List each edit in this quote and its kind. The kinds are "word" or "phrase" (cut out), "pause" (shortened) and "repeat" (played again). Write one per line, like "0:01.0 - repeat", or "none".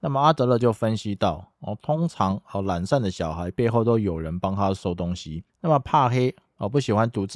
0:05.5 - pause

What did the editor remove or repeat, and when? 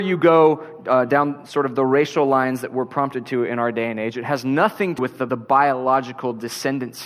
0:05.0 - word
0:05.3 - word

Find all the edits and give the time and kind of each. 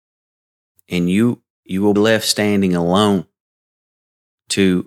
0:01.5 - pause
0:02.0 - word

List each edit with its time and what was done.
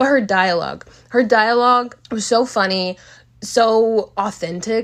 0:02.0 - pause

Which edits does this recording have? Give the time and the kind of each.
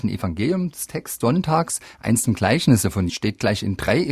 0:01.2 - word
0:02.3 - word
0:03.1 - word

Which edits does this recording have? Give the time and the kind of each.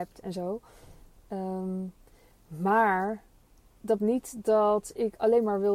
0:04.0 - word

